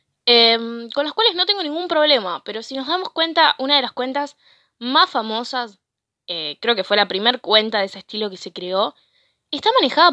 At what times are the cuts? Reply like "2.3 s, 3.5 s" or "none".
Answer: none